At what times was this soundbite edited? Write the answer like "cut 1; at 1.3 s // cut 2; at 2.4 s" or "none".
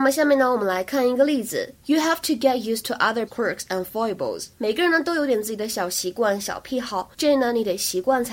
cut 1; at 3.3 s // cut 2; at 4.5 s // cut 3; at 7.1 s